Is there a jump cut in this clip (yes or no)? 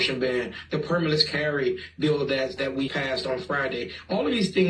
yes